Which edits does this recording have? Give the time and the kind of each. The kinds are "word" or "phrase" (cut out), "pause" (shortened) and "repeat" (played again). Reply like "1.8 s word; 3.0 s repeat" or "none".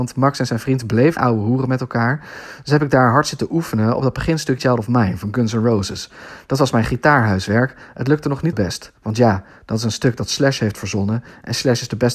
1.2 s phrase; 4.6 s phrase; 8.5 s word; 9.0 s pause